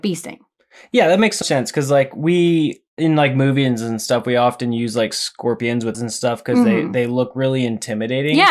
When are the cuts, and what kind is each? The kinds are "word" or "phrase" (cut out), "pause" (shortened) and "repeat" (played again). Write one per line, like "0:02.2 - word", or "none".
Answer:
0:01.4 - word
0:05.9 - phrase